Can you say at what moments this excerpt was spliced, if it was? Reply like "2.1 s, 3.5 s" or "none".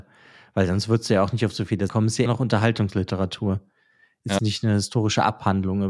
1.9 s, 2.3 s, 4.4 s